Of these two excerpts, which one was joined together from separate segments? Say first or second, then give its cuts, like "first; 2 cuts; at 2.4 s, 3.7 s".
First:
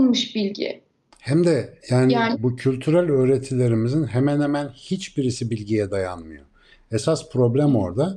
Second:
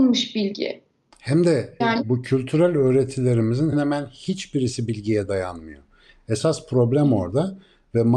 second; 2 cuts; at 1.8 s, 3.7 s